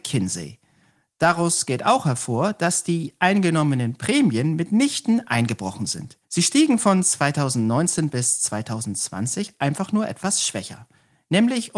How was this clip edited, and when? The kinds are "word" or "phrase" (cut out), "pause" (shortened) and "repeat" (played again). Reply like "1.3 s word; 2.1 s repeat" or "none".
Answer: 6.2 s pause